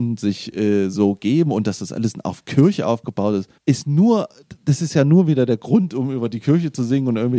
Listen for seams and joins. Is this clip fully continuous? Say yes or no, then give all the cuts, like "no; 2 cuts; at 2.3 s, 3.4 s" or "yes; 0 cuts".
no; 1 cut; at 3.6 s